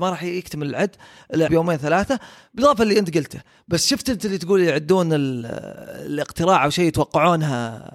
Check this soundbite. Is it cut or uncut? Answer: cut